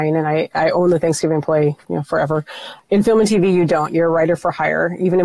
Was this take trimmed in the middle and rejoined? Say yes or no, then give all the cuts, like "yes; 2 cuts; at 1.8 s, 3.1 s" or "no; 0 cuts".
yes; 1 cut; at 1.8 s